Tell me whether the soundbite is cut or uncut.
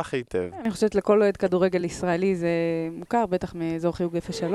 uncut